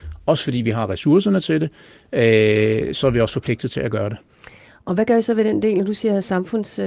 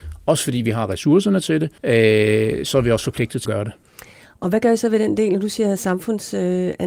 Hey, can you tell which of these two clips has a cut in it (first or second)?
second